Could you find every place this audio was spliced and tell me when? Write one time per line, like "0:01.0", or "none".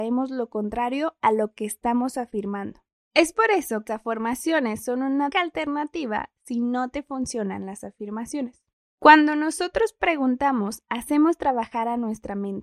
0:02.9
0:03.9
0:05.3
0:08.7